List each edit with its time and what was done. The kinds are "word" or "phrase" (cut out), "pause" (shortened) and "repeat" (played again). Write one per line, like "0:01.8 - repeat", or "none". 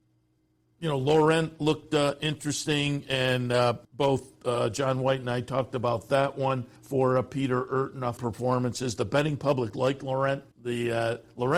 0:03.8 - pause
0:06.8 - pause
0:08.2 - phrase
0:10.5 - pause